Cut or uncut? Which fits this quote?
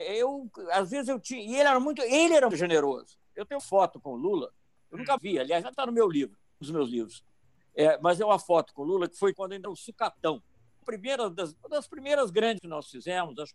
cut